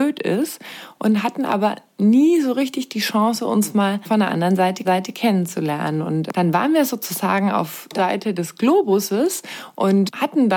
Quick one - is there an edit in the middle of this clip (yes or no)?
yes